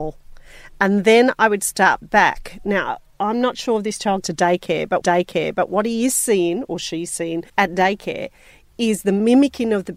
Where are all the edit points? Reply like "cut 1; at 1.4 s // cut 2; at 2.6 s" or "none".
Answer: cut 1; at 4.2 s // cut 2; at 5.0 s // cut 3; at 7.5 s